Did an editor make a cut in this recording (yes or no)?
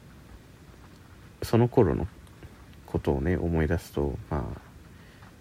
yes